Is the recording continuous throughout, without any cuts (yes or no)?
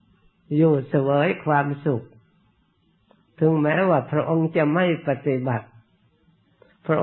yes